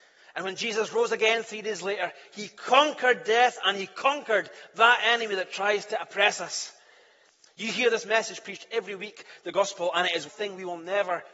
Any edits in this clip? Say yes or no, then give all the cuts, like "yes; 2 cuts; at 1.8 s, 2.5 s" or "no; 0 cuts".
yes; 1 cut; at 10.3 s